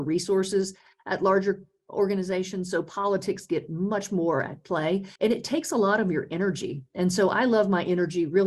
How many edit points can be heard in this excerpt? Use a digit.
1